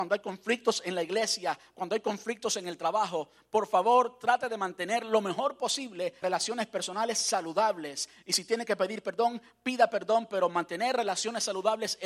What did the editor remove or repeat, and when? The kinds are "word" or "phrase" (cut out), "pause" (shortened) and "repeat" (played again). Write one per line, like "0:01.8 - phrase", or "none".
0:06.2 - word